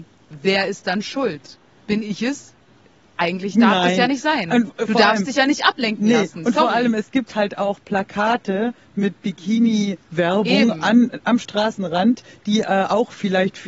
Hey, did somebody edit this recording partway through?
no; 0 cuts

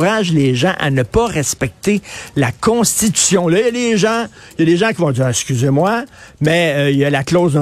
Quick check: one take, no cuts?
yes; 0 cuts

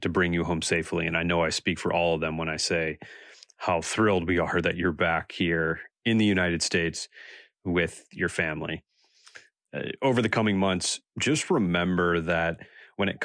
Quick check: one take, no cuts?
yes; 0 cuts

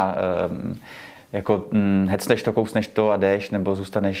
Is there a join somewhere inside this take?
no; 0 cuts

